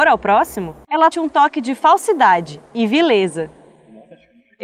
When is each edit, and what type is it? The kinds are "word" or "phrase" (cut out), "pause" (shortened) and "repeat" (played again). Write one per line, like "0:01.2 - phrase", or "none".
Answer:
0:01.1 - phrase